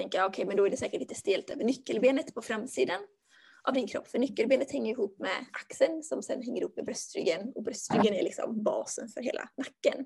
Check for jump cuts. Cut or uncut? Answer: uncut